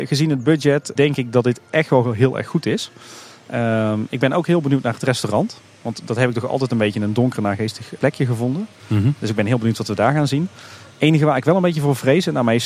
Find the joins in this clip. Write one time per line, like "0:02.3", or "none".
0:01.0
0:08.0